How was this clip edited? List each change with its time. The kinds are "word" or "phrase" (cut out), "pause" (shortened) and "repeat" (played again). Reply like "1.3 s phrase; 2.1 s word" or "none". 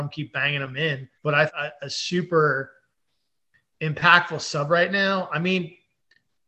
1.1 s pause; 1.5 s phrase